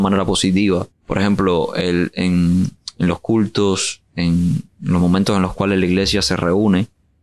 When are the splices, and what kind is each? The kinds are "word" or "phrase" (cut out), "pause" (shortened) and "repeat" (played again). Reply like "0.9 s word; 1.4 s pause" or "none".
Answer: 0.9 s pause